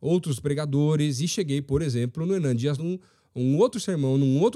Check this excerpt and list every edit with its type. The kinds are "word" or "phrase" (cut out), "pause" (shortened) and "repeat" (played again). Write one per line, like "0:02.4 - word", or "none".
0:02.8 - phrase